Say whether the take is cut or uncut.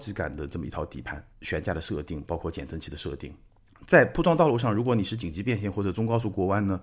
cut